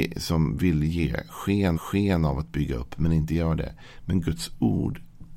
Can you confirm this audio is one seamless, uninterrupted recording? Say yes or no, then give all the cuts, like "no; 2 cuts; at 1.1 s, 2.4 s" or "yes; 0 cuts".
no; 1 cut; at 1.7 s